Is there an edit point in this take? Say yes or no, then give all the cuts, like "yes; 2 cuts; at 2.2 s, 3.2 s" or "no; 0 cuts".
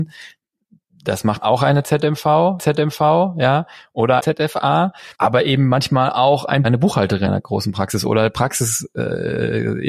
yes; 6 cuts; at 1.4 s, 2.6 s, 4.2 s, 5.1 s, 6.6 s, 7.3 s